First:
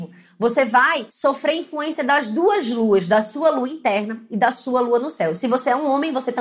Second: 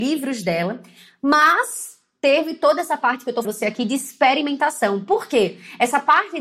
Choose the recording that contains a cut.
second; 1 cut; at 3.4 s

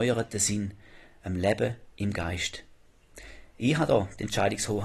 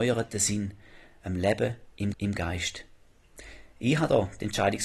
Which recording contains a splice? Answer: second; 1 cut; at 2.1 s

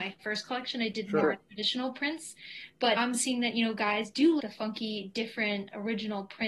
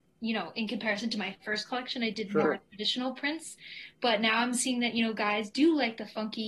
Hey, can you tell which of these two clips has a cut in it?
first; 2 cuts; at 3.0 s, 4.4 s

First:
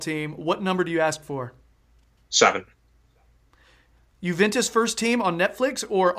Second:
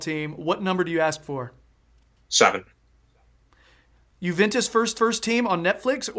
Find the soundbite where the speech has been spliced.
second; 1 cut; at 4.9 s

